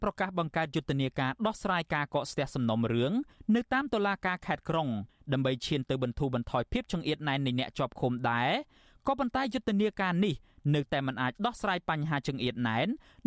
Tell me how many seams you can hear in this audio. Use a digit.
0